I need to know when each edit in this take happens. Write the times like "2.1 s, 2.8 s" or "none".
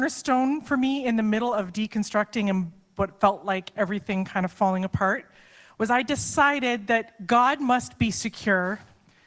none